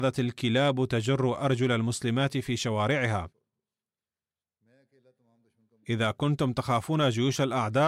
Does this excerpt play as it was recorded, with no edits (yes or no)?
yes